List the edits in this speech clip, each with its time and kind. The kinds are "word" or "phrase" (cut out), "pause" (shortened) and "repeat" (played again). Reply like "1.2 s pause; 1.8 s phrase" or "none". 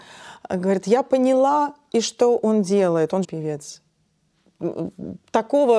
1.9 s word; 3.2 s phrase